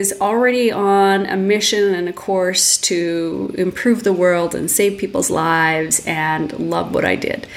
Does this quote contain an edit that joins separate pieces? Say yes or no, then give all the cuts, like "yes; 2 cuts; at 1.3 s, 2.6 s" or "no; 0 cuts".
no; 0 cuts